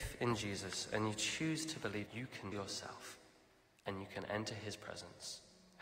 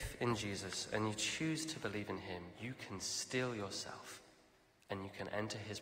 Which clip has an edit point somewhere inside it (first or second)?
first